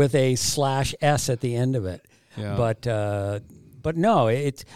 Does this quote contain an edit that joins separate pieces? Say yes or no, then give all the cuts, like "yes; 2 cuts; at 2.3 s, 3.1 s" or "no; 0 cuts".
no; 0 cuts